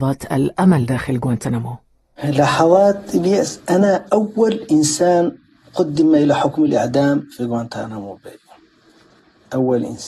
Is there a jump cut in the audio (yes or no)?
no